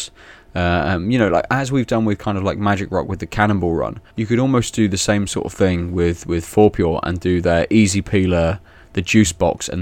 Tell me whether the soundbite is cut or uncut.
cut